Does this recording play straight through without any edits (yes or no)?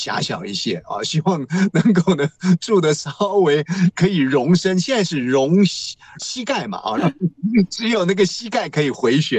no